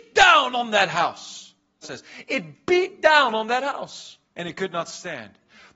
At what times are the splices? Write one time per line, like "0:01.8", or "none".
0:01.8
0:04.2

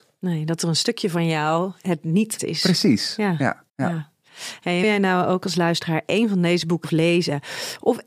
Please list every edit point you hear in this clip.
0:02.4
0:03.7
0:04.8
0:06.8

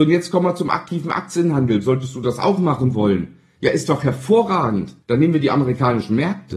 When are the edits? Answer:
0:05.0

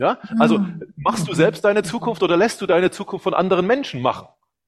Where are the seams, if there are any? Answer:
none

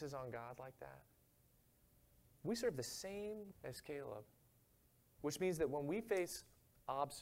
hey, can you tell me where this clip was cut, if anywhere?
0:03.5

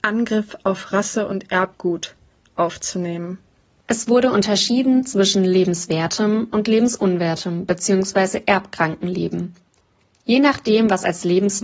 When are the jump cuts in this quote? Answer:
none

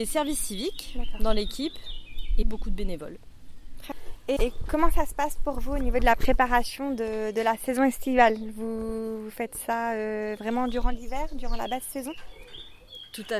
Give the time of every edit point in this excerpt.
0:02.4
0:04.4

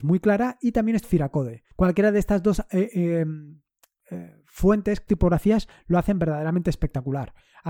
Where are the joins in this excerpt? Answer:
0:01.0
0:01.7
0:05.1

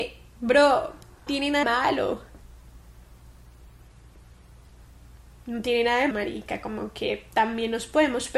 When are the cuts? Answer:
0:01.3
0:01.6
0:06.1

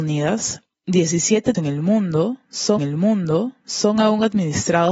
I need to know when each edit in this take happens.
0:01.5
0:02.8

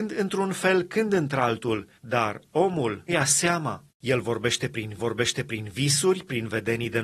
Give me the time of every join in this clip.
0:02.0
0:03.1
0:03.9
0:05.0

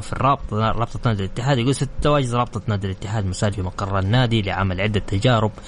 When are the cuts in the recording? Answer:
0:03.5

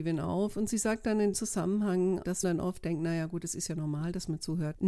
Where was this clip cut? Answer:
0:01.3
0:02.4

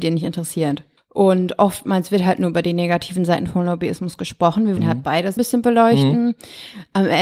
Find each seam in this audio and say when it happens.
0:04.8
0:05.4

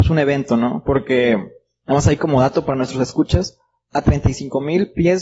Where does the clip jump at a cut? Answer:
none

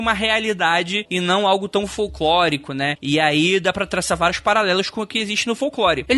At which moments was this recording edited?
none

